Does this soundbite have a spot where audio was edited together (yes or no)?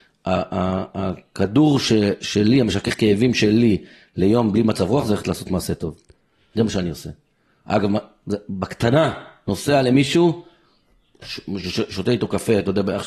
no